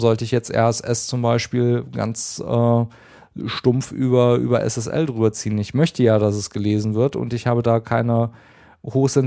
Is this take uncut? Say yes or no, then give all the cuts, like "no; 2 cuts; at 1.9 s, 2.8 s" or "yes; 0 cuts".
yes; 0 cuts